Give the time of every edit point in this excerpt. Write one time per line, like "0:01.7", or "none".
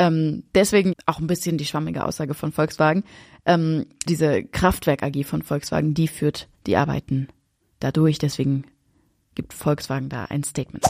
0:00.9
0:04.1
0:06.5

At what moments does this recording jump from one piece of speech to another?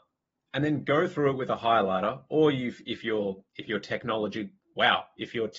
0:03.5

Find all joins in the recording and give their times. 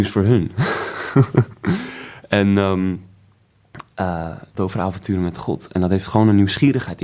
0:04.5

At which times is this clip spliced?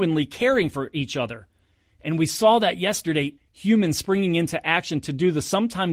0:03.4

